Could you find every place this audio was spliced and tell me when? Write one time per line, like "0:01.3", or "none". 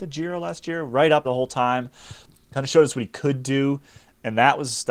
0:01.2